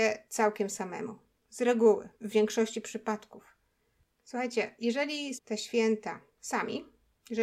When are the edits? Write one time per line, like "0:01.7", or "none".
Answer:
0:02.1
0:05.4